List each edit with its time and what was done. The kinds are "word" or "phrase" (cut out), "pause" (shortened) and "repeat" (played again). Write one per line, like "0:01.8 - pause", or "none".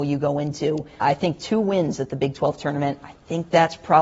0:01.0 - word